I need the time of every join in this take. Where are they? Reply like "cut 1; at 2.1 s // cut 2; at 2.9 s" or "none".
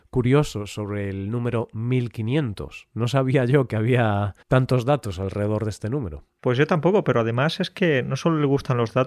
cut 1; at 4.4 s